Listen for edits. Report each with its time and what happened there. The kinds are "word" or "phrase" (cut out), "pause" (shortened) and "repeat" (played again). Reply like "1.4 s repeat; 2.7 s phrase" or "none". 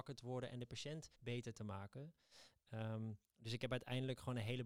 1.1 s pause